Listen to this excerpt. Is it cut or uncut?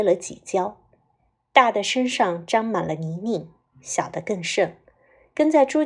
uncut